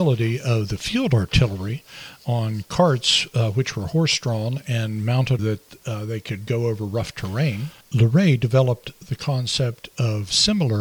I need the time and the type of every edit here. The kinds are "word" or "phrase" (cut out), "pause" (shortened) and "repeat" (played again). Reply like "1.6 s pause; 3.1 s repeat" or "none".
5.4 s phrase; 7.8 s pause